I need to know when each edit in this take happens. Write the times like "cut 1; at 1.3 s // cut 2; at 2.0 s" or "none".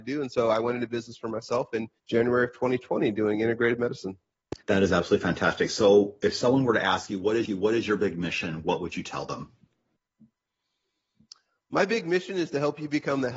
cut 1; at 2.0 s // cut 2; at 4.6 s // cut 3; at 7.4 s